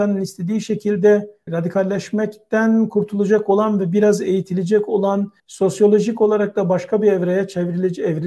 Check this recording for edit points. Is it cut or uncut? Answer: cut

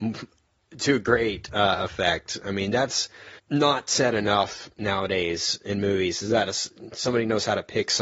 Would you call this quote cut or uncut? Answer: cut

